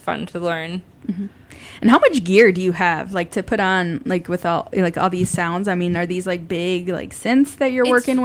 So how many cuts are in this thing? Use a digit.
1